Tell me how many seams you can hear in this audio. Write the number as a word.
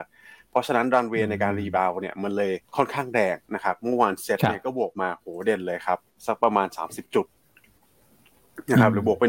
two